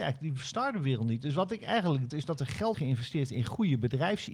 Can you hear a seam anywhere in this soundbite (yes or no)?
yes